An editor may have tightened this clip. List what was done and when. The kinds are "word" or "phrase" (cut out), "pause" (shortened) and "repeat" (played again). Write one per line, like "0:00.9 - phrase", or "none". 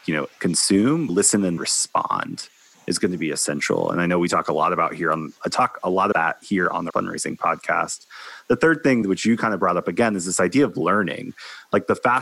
0:01.1 - word
0:01.6 - word
0:05.4 - word
0:06.1 - word
0:06.9 - word
0:09.0 - word